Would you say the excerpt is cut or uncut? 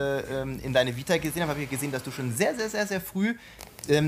uncut